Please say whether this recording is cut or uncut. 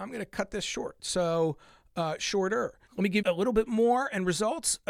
cut